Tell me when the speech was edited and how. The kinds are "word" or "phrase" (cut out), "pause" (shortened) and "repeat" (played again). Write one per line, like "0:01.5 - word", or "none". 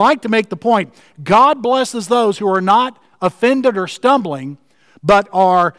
none